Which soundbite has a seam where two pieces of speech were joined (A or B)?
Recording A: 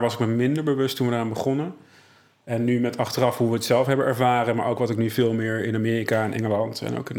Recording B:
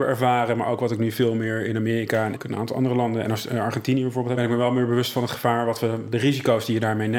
B